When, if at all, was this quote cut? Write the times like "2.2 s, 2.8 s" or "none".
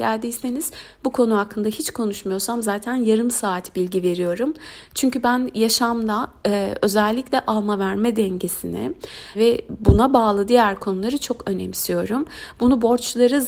9.3 s